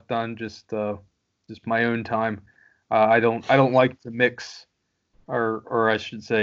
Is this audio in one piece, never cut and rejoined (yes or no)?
yes